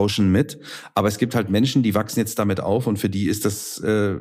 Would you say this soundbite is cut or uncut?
uncut